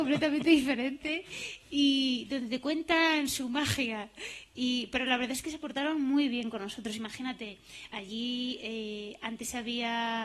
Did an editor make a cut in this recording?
no; 0 cuts

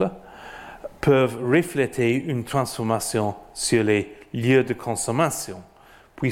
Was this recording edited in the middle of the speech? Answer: no; 0 cuts

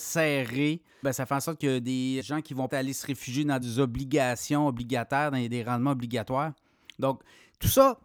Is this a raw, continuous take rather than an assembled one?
no; 4 cuts; at 1.0 s, 2.2 s, 2.7 s, 3.6 s

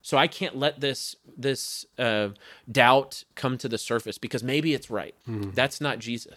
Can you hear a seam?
yes; 1 cut; at 5.2 s

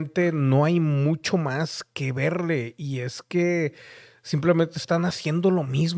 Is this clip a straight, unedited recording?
yes; 0 cuts

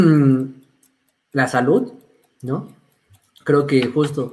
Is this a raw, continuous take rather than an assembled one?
yes; 0 cuts

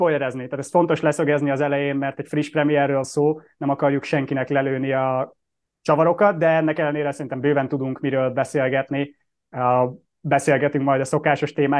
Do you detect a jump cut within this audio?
yes; 1 cut; at 3.0 s

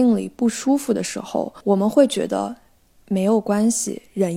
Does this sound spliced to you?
no; 0 cuts

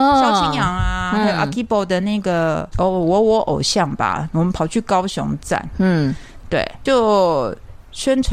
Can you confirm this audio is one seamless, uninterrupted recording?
no; 1 cut; at 6.9 s

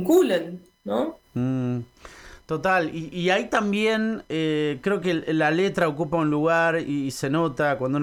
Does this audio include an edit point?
no; 0 cuts

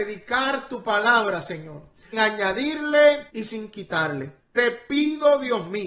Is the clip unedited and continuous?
no; 3 cuts; at 2.1 s, 3.3 s, 4.4 s

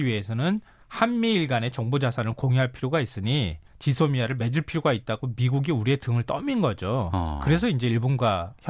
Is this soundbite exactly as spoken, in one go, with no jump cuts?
no; 1 cut; at 3.7 s

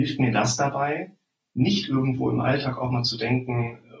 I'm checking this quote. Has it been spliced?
no; 0 cuts

